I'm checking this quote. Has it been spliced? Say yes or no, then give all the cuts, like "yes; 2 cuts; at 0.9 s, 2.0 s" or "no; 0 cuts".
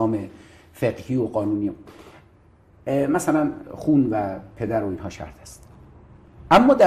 no; 0 cuts